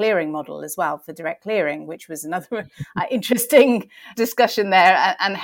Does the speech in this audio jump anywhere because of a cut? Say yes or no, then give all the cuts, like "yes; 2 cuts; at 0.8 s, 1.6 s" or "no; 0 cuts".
yes; 1 cut; at 4.2 s